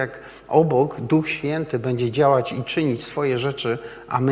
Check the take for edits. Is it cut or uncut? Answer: uncut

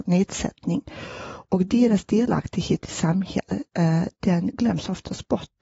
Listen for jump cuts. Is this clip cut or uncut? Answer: uncut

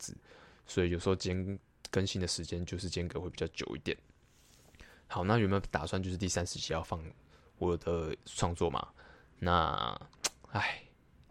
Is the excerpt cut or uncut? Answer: uncut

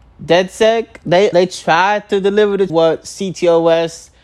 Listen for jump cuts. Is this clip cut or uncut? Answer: cut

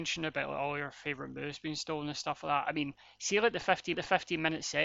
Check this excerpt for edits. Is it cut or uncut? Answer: cut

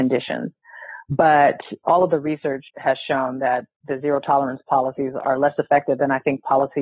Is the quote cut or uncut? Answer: cut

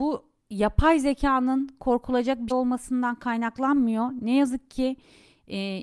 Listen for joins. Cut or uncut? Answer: cut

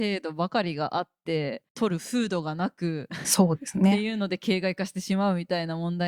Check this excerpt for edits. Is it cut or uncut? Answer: cut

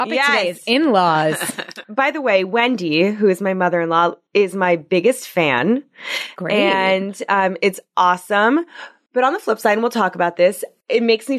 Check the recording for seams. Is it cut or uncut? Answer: uncut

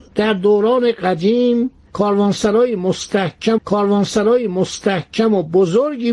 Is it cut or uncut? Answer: cut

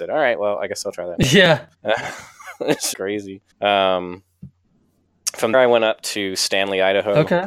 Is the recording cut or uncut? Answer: cut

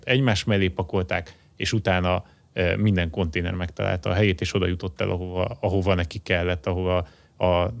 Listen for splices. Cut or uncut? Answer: uncut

